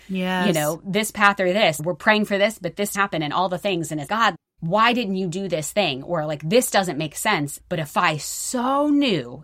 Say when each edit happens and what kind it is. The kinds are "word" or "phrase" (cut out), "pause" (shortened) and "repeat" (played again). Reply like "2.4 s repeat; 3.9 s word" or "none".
2.9 s word; 4.1 s word